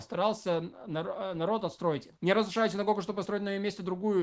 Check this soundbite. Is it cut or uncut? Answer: cut